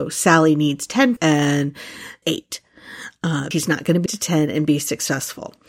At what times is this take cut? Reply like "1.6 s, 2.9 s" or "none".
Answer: 1.2 s, 2.2 s, 3.5 s, 4.1 s

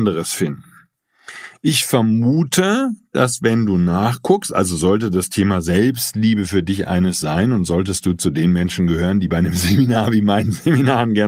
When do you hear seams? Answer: none

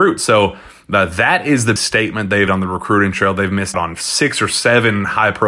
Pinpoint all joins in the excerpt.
1.8 s, 2.5 s, 3.7 s

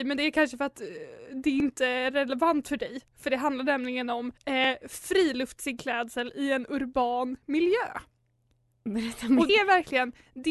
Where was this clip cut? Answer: 3.1 s, 4.4 s, 9.5 s

